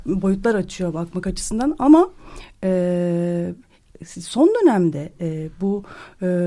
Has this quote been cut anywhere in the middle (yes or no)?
no